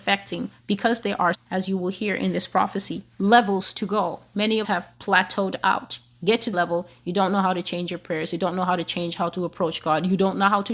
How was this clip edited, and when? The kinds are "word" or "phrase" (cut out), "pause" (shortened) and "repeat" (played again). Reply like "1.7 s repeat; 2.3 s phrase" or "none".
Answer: 1.3 s word; 3.1 s pause; 4.6 s word; 6.5 s word